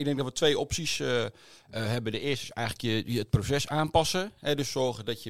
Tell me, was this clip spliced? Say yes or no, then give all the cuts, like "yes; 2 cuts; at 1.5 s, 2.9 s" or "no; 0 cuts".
no; 0 cuts